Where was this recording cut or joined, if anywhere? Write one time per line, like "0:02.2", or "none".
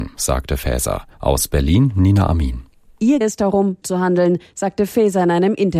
0:01.1
0:03.2
0:03.8